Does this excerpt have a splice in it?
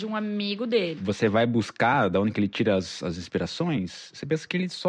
no; 0 cuts

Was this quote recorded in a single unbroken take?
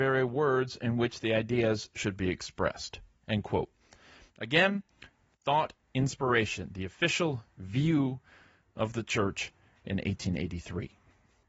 yes; 0 cuts

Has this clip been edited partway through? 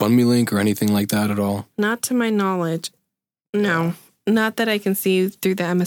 no; 0 cuts

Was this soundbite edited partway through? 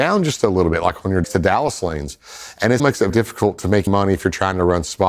yes; 4 cuts; at 1.2 s, 2.8 s, 3.1 s, 3.9 s

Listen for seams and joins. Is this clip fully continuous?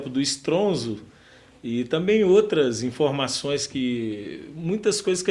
yes; 0 cuts

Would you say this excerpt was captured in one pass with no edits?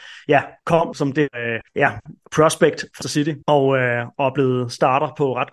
no; 5 cuts; at 0.9 s, 1.3 s, 1.7 s, 3.0 s, 3.4 s

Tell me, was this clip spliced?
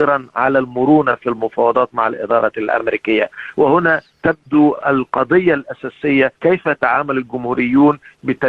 yes; 1 cut; at 6.4 s

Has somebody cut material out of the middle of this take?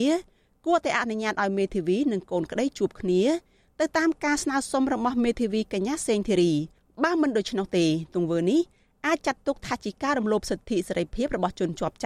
no; 0 cuts

